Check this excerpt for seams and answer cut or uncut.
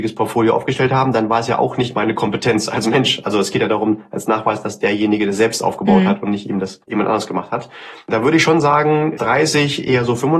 cut